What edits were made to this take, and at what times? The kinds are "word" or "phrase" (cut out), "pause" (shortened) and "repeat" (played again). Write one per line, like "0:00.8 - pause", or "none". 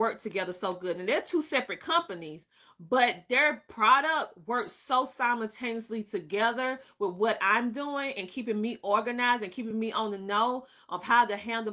none